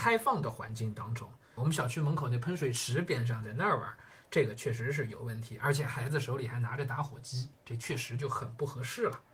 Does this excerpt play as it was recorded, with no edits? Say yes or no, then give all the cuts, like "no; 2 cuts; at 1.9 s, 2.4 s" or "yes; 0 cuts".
no; 1 cut; at 1.6 s